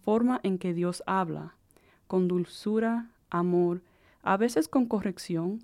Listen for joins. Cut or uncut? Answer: uncut